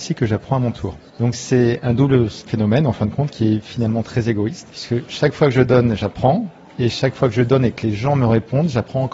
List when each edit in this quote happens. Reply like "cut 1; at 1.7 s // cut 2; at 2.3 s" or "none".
none